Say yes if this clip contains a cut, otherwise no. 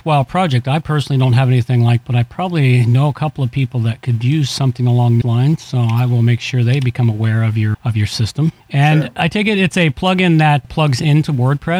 yes